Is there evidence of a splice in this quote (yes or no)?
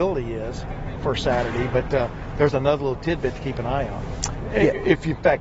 no